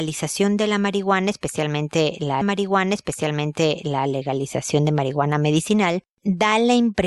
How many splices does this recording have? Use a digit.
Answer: 1